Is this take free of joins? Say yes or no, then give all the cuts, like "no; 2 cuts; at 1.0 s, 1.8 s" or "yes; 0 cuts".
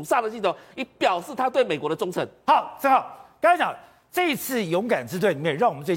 yes; 0 cuts